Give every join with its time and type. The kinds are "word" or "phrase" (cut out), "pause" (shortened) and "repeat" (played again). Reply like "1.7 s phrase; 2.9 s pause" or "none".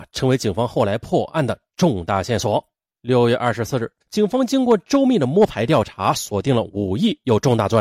2.9 s pause; 4.0 s pause

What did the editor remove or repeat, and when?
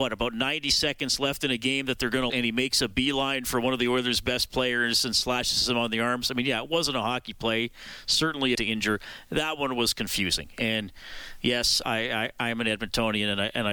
2.3 s word; 8.5 s phrase; 11.8 s word

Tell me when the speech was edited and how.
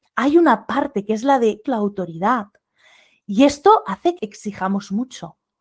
1.6 s word; 4.2 s word

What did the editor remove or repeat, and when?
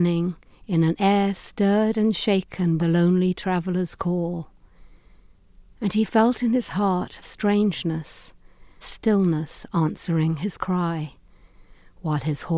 2.8 s word; 7.2 s word; 8.8 s word

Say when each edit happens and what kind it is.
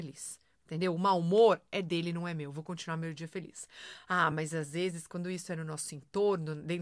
none

